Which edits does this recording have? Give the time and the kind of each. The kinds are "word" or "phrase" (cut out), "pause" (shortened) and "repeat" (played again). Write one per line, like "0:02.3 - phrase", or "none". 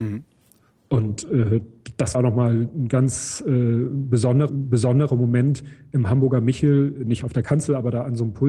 0:02.1 - phrase
0:04.5 - repeat